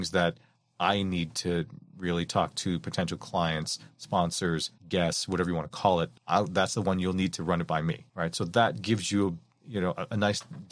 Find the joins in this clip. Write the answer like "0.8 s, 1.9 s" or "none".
4.8 s, 6.2 s, 8.1 s